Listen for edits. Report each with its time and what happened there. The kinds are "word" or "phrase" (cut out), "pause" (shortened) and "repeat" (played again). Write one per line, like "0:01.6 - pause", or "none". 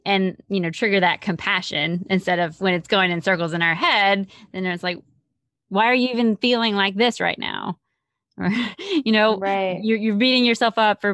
none